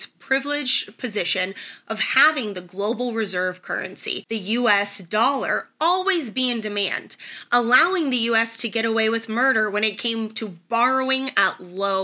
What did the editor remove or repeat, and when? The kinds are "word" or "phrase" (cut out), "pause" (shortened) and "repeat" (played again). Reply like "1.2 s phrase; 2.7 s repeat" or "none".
none